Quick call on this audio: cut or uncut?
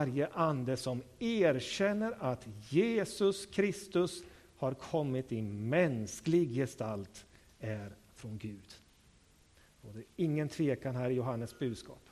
uncut